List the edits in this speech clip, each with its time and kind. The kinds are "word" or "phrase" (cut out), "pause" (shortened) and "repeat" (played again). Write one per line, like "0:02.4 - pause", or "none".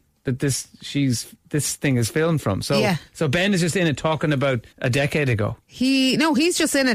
0:01.4 - pause
0:04.7 - pause
0:05.6 - pause

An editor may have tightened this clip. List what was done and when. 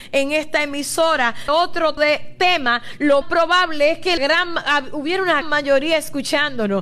0:01.5 - word
0:02.0 - word
0:03.2 - word
0:04.2 - word
0:05.4 - word

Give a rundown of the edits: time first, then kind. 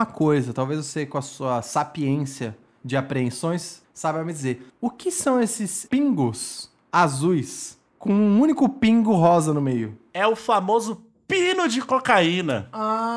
none

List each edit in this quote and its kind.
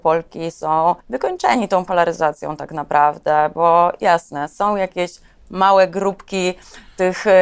0:01.0 - pause

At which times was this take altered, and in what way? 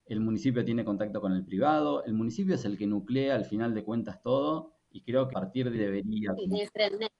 0:05.3 - word
0:05.8 - word

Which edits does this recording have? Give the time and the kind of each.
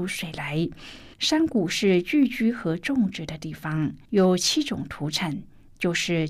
0:01.1 - pause
0:04.1 - pause

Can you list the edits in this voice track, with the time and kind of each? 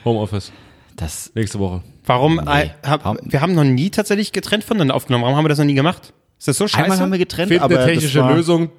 none

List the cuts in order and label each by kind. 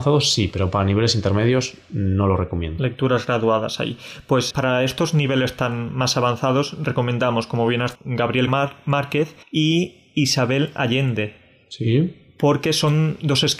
0:04.5 - word
0:07.9 - word
0:08.5 - word
0:09.4 - pause

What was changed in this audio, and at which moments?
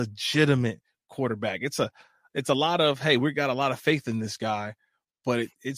none

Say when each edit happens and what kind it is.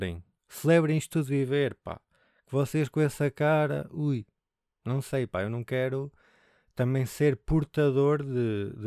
none

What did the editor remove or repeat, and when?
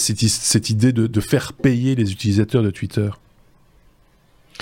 none

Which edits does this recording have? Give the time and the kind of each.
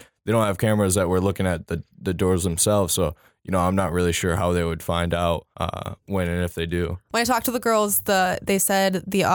0:05.5 - pause

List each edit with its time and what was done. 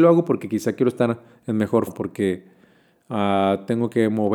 0:01.9 - word

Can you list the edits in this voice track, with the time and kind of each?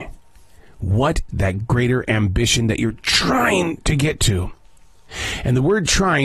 0:01.3 - word

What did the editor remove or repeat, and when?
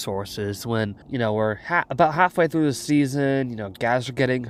0:01.0 - pause

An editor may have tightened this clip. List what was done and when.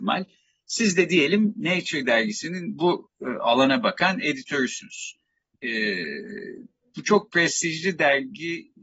none

